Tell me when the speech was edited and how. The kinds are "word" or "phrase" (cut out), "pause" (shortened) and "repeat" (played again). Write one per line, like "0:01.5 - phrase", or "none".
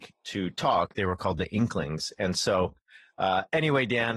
none